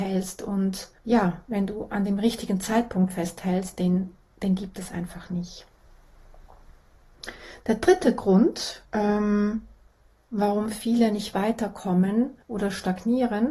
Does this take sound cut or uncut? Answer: cut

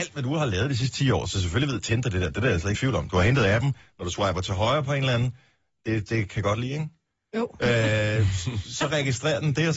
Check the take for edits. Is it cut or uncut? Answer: cut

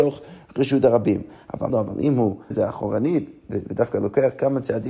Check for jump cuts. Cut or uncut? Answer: cut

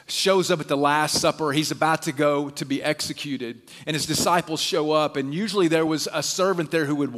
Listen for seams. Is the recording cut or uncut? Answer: uncut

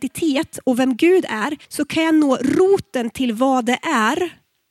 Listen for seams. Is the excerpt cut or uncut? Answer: cut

